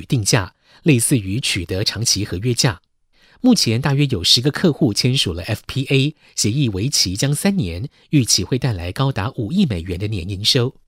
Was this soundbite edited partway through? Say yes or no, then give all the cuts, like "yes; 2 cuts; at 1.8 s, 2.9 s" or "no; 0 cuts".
no; 0 cuts